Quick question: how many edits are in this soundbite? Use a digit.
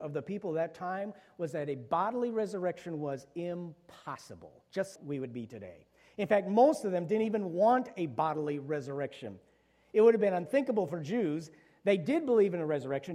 1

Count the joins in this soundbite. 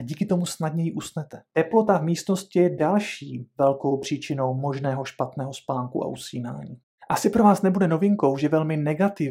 0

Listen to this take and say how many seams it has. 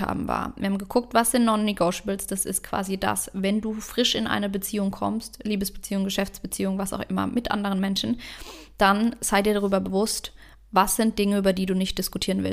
0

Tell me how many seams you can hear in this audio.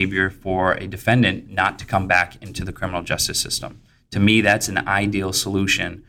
0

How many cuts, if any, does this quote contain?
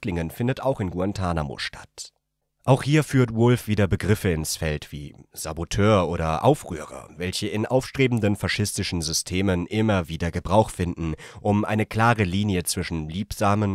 0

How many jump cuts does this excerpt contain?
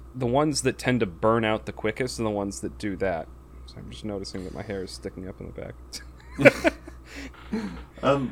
0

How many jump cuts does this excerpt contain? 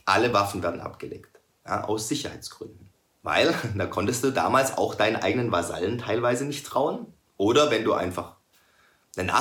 1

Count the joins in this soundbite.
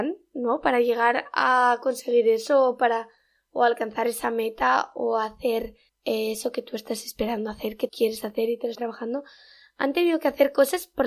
3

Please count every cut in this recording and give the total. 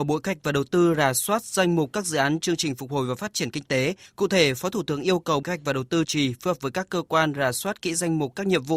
3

